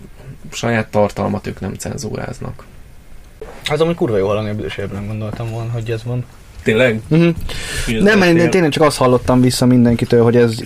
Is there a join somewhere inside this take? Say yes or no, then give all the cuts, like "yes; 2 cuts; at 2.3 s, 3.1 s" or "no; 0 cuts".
no; 0 cuts